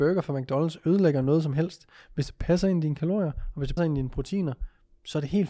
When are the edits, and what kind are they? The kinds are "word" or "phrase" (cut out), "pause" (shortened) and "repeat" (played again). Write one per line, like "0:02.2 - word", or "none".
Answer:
0:03.8 - word